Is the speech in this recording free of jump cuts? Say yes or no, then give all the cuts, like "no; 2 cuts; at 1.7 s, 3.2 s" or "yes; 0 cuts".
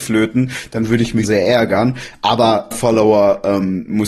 no; 2 cuts; at 1.2 s, 2.7 s